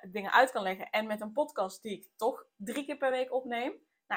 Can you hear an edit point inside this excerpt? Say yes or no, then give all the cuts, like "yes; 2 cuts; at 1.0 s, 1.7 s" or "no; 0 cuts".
no; 0 cuts